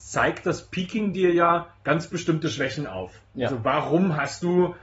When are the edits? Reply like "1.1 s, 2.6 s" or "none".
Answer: none